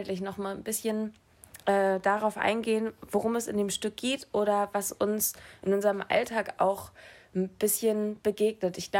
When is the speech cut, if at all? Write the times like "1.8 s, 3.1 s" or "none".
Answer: none